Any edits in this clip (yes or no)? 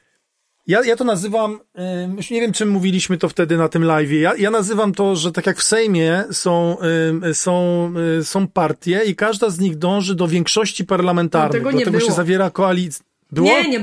no